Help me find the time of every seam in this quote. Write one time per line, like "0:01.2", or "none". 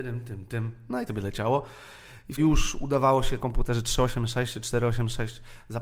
0:01.1
0:02.4
0:03.4